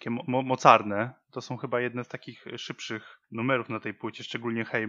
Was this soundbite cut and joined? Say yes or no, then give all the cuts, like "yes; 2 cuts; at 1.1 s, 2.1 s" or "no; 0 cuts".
no; 0 cuts